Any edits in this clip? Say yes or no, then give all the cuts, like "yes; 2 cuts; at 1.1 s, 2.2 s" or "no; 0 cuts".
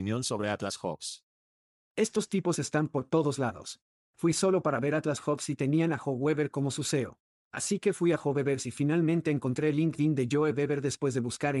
no; 0 cuts